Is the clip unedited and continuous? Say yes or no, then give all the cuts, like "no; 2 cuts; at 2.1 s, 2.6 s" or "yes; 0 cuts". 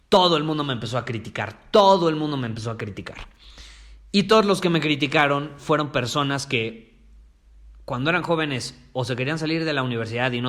yes; 0 cuts